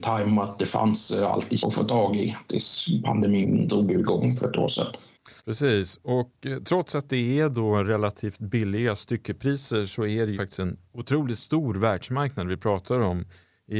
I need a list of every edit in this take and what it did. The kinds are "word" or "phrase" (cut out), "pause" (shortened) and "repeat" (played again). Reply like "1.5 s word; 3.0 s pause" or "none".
1.6 s word; 5.4 s pause; 10.3 s word